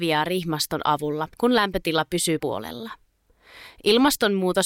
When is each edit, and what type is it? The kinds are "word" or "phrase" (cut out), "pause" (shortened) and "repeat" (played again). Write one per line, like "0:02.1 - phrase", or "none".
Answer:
0:01.3 - pause
0:02.4 - word